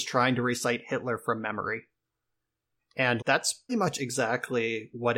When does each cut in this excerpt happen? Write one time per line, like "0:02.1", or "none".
0:03.2
0:03.7